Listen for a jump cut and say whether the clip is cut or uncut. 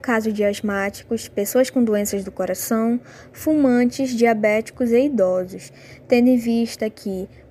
uncut